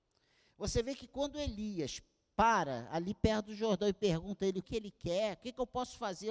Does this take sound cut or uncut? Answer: cut